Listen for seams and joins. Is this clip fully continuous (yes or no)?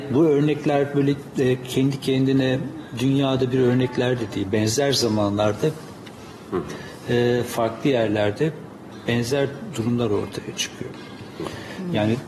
yes